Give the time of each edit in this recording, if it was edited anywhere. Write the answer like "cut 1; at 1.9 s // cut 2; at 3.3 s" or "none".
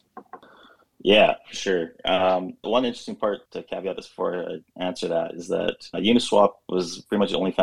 cut 1; at 2.6 s // cut 2; at 3.5 s // cut 3; at 5.9 s